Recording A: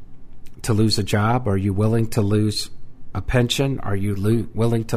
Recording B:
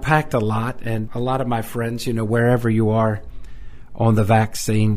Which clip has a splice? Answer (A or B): B